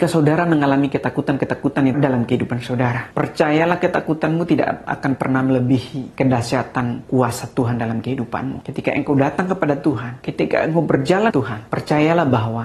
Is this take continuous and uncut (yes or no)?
no